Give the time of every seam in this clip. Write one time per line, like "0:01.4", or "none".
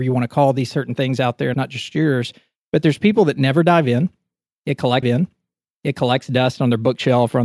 0:01.5
0:05.0